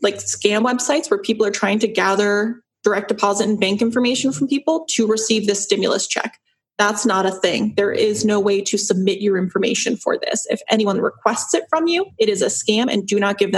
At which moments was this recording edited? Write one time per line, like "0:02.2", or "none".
none